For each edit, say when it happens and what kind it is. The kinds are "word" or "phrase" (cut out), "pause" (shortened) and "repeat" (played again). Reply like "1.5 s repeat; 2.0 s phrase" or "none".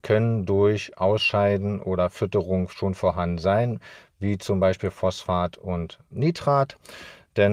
6.1 s word